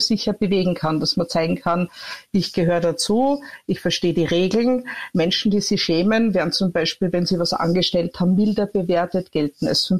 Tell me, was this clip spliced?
no; 0 cuts

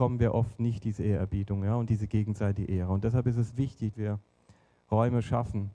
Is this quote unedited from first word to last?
no; 2 cuts; at 1.9 s, 3.9 s

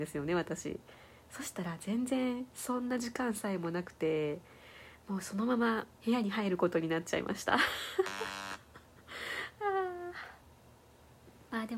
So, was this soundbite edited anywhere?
yes; 1 cut; at 6.0 s

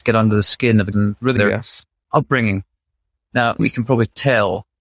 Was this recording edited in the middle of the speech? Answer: yes; 3 cuts; at 0.9 s, 1.4 s, 3.6 s

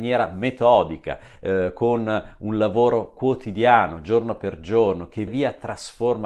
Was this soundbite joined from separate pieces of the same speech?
yes; 1 cut; at 5.3 s

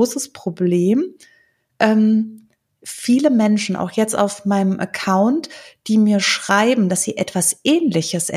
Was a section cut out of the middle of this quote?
no; 0 cuts

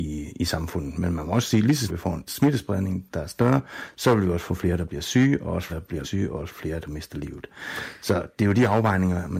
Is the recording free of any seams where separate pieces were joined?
no; 4 cuts; at 1.9 s, 2.3 s, 5.7 s, 6.0 s

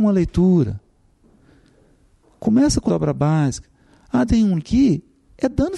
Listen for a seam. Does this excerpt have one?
yes; 3 cuts; at 2.9 s, 4.3 s, 4.6 s

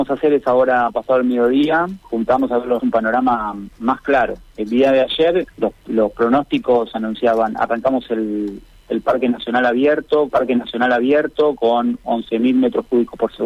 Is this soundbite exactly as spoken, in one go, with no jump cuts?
no; 4 cuts; at 2.0 s, 2.8 s, 5.5 s, 10.3 s

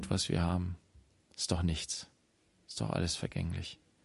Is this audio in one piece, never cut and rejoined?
yes; 0 cuts

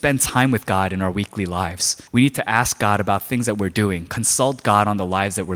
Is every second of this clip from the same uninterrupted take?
no; 1 cut; at 2.1 s

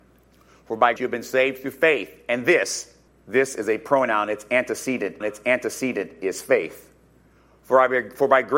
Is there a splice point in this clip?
yes; 3 cuts; at 1.0 s, 3.1 s, 5.2 s

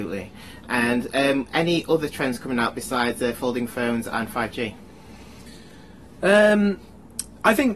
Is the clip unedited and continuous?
yes; 0 cuts

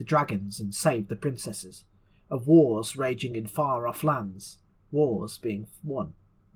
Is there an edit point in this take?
no; 0 cuts

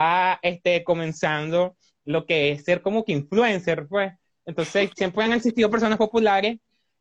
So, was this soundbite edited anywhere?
no; 0 cuts

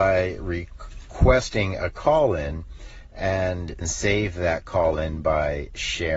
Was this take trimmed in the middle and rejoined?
yes; 1 cut; at 3.8 s

